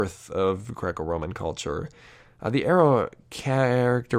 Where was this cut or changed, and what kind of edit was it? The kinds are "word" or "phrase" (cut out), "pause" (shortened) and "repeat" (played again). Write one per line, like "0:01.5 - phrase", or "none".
none